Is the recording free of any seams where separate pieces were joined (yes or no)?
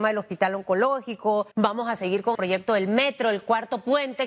no